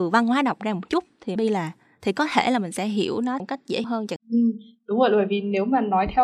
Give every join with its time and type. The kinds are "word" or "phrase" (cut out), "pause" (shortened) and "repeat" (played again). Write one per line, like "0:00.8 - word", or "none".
0:01.4 - word
0:03.4 - word
0:03.8 - word
0:04.2 - word